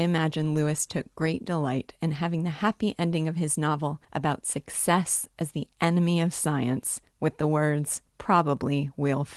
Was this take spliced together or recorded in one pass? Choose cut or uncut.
cut